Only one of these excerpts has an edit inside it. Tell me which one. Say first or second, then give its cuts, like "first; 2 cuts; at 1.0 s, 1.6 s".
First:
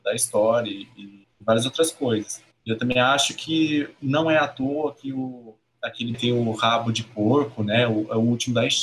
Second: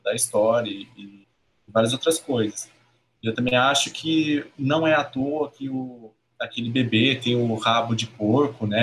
first; 3 cuts; at 1.3 s, 2.5 s, 6.1 s